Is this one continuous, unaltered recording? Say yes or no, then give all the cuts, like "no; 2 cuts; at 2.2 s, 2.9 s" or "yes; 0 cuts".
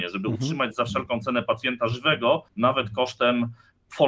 no; 1 cut; at 2.5 s